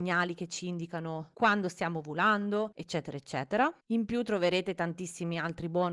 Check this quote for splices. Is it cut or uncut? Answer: uncut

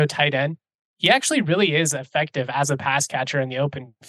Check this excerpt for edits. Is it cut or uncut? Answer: uncut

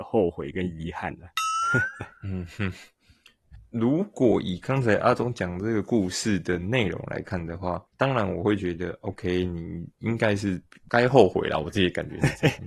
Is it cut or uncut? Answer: cut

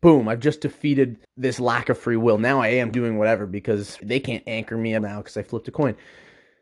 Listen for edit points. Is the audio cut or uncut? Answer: cut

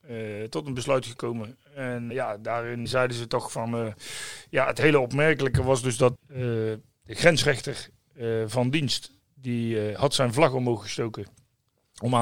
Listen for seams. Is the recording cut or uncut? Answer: cut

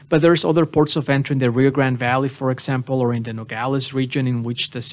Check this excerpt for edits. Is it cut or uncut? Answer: uncut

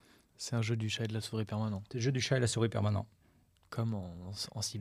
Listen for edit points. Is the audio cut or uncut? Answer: uncut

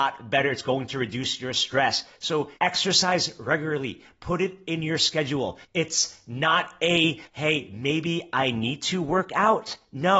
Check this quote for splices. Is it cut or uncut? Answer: cut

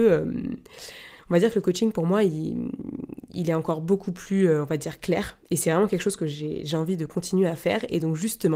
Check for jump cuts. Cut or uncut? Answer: uncut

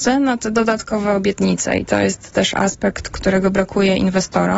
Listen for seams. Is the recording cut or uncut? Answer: uncut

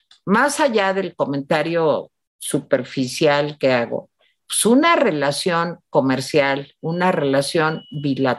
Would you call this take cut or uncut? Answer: uncut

